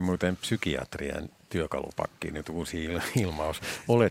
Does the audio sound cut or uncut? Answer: uncut